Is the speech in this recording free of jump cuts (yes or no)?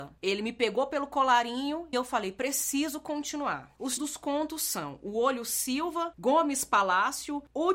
no